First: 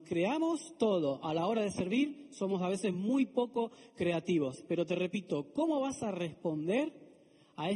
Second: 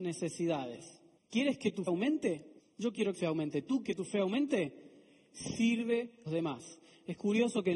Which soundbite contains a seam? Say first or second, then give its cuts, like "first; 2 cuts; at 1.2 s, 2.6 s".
second; 6 cuts; at 1.2 s, 1.9 s, 2.6 s, 3.1 s, 3.8 s, 6.3 s